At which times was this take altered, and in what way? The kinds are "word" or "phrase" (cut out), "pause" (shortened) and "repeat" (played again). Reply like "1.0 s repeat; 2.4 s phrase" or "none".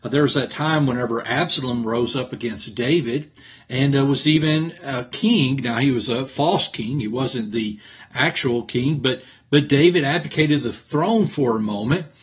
none